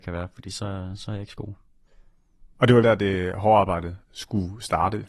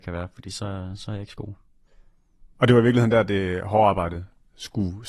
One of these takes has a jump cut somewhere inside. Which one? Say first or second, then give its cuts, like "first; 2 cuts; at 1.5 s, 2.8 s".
first; 2 cuts; at 2.8 s, 4.0 s